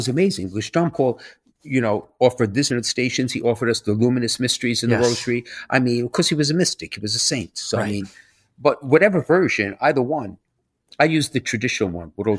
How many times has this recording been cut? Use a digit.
1